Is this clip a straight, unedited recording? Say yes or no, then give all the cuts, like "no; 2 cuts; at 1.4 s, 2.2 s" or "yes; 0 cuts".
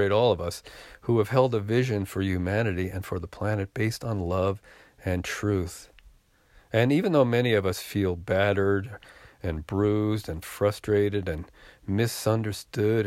yes; 0 cuts